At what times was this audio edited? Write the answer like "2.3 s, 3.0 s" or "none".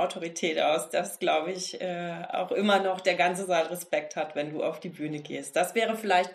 none